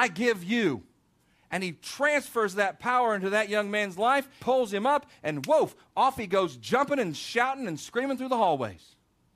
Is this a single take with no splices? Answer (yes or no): no